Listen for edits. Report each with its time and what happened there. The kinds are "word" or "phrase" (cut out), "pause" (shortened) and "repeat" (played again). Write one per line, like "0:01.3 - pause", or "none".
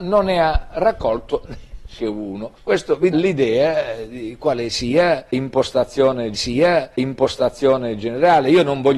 0:02.0 - word
0:02.6 - pause
0:03.1 - word
0:06.3 - repeat